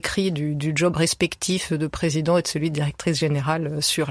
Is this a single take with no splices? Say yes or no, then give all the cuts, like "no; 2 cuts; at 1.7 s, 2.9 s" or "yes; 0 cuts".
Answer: yes; 0 cuts